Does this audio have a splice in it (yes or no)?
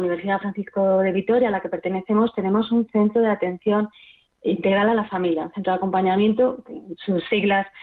yes